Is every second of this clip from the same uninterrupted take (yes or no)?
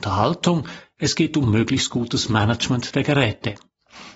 yes